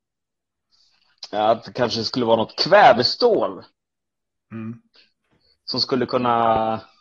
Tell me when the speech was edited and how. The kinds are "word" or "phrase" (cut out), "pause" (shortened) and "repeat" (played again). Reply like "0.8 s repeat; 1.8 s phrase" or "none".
none